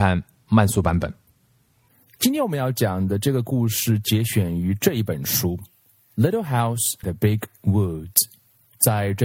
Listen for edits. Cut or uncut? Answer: cut